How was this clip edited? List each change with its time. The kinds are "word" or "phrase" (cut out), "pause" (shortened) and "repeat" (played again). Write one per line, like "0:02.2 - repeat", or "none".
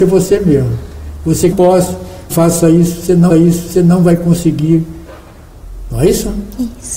0:01.5 - phrase
0:02.3 - word
0:03.3 - repeat